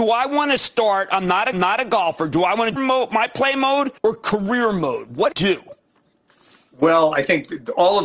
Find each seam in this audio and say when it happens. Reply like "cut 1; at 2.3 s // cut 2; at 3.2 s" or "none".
cut 1; at 1.5 s // cut 2; at 2.8 s // cut 3; at 4.0 s // cut 4; at 5.3 s